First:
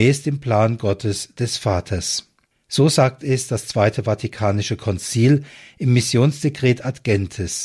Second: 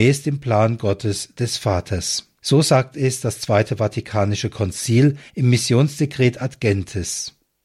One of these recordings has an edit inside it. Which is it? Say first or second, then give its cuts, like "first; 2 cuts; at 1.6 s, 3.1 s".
second; 2 cuts; at 2.4 s, 5.3 s